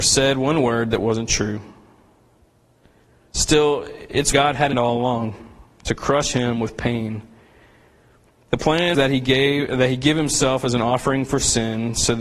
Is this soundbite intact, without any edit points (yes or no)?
no